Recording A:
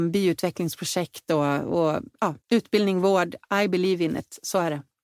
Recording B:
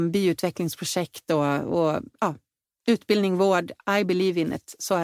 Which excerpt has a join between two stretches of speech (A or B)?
A